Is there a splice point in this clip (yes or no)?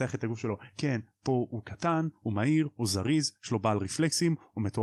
no